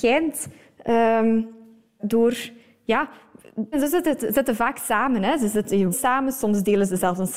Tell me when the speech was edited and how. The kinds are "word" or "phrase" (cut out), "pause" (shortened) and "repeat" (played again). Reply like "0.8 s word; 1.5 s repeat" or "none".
2.0 s word; 3.7 s word; 5.9 s word